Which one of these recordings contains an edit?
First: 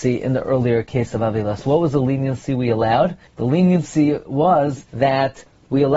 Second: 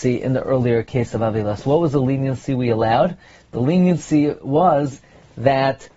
first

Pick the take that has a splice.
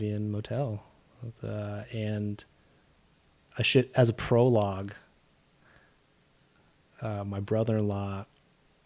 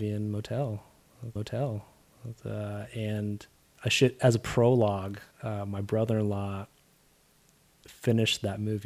second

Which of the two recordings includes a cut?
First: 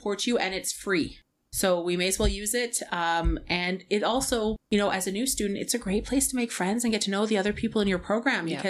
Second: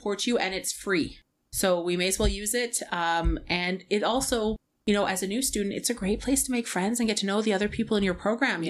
first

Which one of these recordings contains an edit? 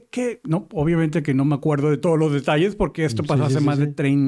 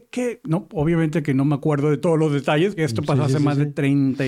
second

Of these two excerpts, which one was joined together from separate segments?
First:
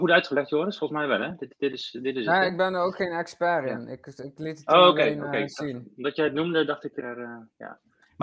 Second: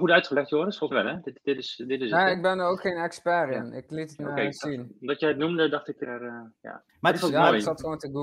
second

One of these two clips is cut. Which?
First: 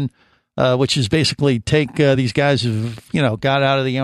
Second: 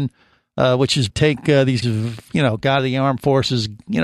second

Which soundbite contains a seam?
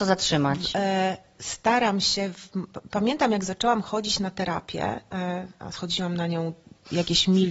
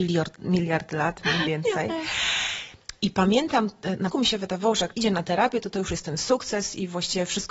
second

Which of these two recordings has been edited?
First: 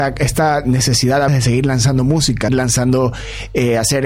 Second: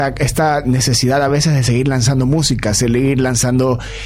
first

